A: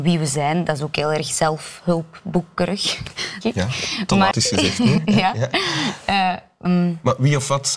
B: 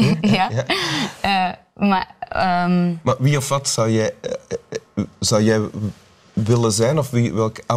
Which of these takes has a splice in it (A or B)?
A